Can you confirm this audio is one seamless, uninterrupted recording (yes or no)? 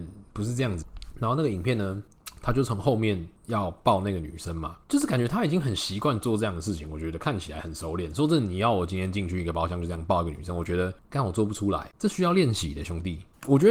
no